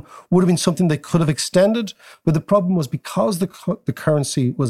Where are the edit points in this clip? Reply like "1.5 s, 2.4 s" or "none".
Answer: none